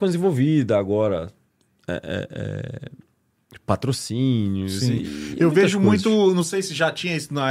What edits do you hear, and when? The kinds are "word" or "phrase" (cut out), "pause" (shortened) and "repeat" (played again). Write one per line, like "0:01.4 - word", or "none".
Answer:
none